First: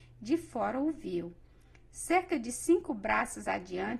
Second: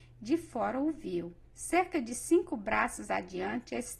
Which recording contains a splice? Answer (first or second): second